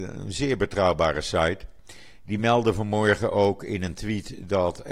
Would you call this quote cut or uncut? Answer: uncut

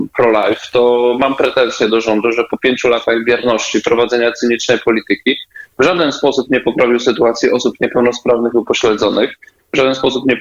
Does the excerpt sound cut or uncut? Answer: uncut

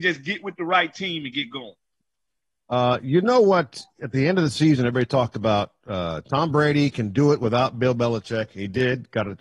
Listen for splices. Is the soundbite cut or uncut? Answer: uncut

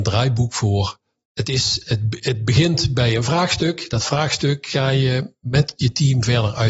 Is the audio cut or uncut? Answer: uncut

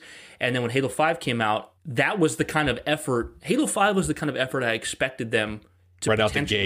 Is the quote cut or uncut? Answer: cut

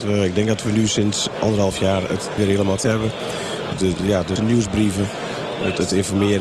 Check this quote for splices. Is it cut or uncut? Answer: cut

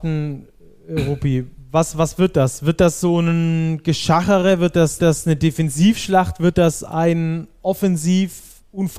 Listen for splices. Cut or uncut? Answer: cut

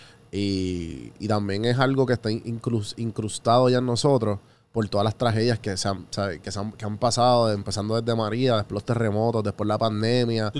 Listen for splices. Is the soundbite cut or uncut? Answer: uncut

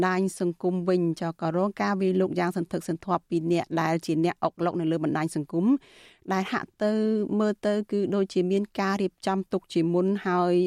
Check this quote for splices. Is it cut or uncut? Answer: uncut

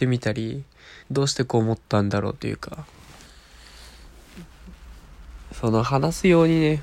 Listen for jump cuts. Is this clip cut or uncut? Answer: cut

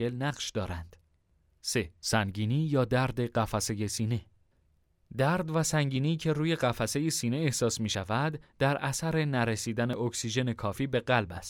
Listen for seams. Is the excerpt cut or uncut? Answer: cut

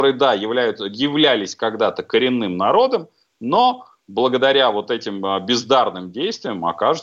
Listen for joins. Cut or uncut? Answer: uncut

